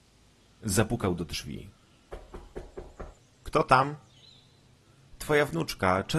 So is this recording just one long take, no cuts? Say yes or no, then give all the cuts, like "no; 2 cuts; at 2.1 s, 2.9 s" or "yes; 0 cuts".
no; 1 cut; at 3.2 s